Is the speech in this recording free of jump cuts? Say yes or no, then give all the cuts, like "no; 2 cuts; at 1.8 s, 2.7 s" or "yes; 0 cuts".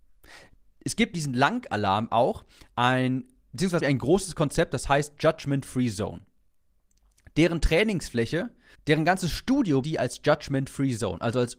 no; 4 cuts; at 1.1 s, 3.8 s, 8.7 s, 9.8 s